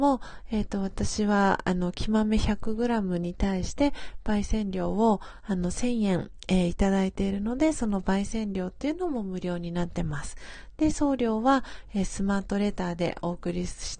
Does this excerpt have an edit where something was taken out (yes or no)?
no